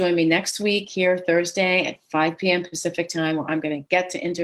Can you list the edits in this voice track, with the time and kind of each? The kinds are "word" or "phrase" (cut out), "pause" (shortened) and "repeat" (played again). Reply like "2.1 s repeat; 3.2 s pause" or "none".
none

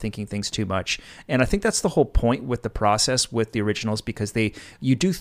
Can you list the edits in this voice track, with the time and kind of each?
none

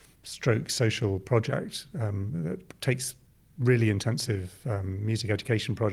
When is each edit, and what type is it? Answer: none

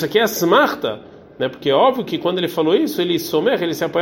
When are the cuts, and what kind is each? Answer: none

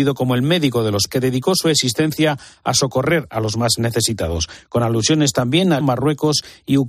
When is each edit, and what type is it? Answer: 1.1 s word; 5.8 s word

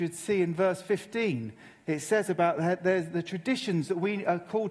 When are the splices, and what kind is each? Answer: none

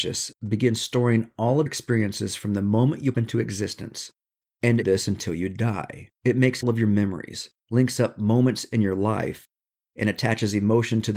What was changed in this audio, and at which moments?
1.7 s word; 3.1 s word; 4.8 s phrase; 6.1 s pause; 6.6 s phrase; 7.6 s pause

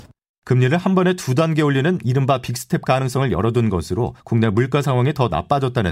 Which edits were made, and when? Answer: 4.2 s pause

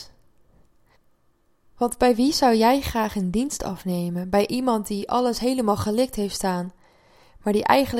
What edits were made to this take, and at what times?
0.9 s pause

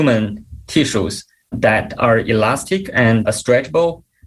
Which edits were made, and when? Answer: 1.5 s word; 3.2 s word

